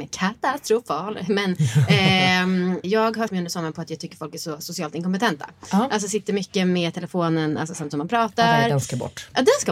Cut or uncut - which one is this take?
cut